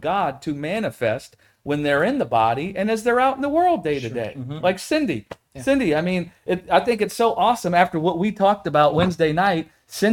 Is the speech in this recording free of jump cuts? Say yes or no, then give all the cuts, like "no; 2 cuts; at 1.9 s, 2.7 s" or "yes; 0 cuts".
yes; 0 cuts